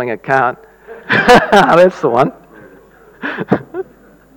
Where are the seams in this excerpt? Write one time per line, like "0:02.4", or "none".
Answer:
0:01.0